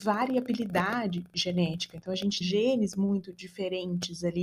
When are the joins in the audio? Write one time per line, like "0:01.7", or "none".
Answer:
0:02.4

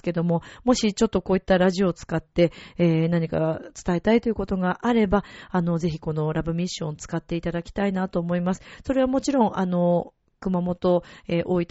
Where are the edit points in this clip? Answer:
none

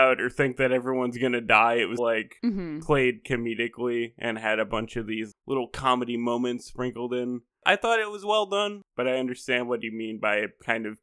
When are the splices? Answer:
0:02.0
0:03.2

